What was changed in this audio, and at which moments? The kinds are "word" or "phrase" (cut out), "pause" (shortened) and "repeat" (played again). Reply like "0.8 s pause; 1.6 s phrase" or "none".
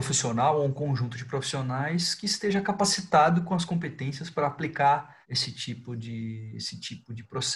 5.2 s pause